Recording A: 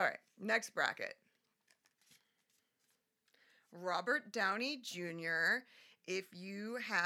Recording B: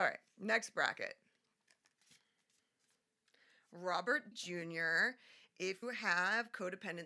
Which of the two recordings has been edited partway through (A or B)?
B